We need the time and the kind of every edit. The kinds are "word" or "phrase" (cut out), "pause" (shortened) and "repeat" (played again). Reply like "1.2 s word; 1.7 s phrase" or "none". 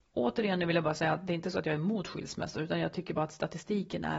none